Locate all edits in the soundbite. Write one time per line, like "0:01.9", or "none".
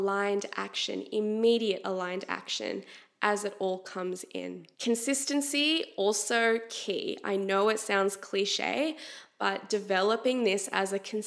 0:04.7